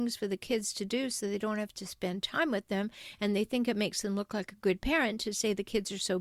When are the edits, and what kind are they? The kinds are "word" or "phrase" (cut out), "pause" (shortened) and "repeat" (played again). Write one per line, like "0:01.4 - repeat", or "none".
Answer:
none